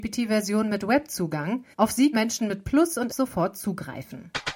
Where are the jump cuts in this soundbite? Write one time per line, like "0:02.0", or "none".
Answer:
0:01.7
0:02.1
0:03.1